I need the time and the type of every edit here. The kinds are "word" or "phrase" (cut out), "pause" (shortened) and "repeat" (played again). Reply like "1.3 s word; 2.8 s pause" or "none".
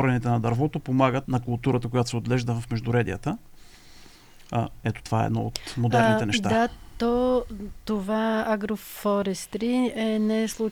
1.3 s word